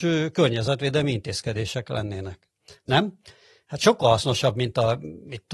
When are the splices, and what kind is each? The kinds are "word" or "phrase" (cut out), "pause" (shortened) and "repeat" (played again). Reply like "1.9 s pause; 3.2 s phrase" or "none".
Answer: none